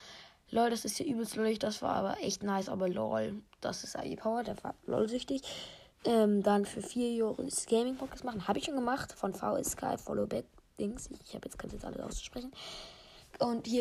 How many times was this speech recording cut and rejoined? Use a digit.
3